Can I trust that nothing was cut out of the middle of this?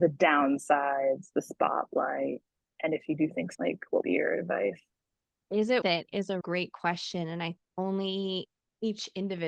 no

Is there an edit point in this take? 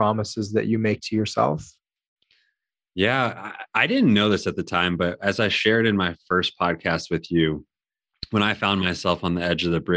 no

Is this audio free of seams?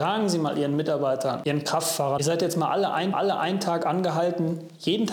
no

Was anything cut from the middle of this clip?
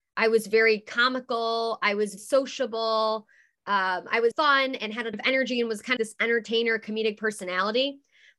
yes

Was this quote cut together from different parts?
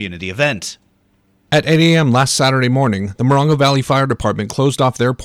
no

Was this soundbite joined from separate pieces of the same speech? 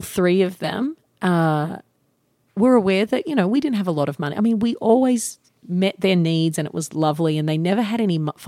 no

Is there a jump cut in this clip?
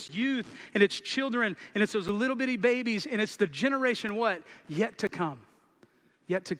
no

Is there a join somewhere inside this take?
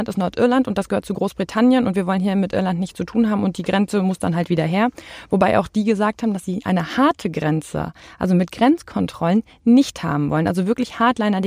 no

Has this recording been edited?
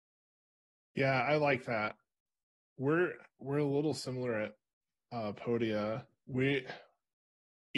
no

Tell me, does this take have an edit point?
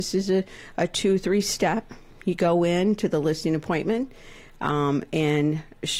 no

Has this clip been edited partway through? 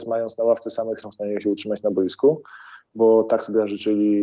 yes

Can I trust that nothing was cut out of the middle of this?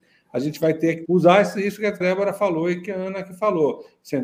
no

